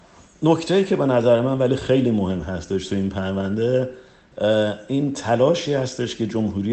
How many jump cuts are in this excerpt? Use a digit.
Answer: 0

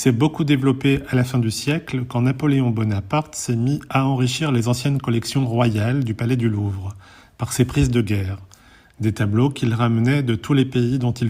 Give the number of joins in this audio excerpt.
0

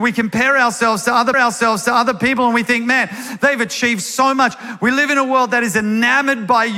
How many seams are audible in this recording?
1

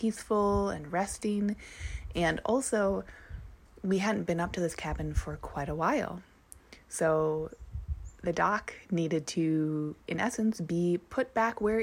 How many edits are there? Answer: 0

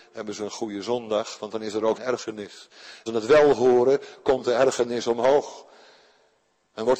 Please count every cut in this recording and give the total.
2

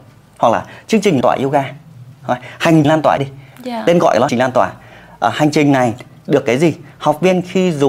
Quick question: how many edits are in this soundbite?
4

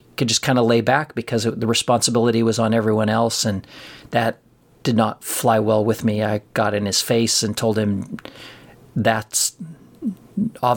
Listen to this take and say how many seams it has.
0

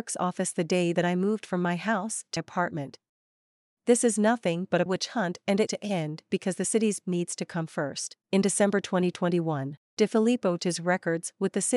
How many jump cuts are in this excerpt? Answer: 6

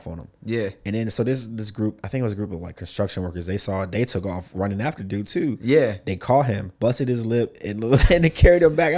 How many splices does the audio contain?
1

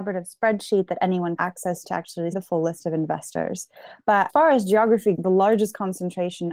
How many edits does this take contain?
5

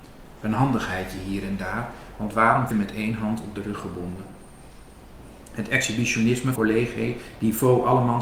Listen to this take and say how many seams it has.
2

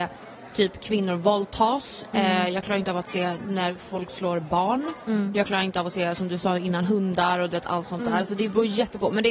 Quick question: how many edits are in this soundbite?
0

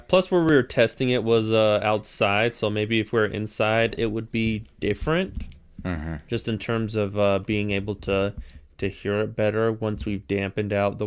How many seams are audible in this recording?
0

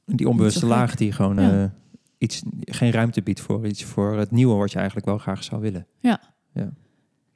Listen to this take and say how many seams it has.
1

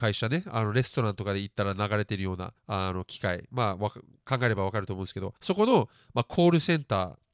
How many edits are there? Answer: 2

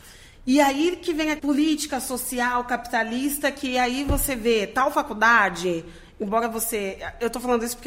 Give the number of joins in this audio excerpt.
1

